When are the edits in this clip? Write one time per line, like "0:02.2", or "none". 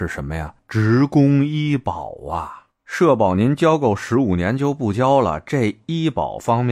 none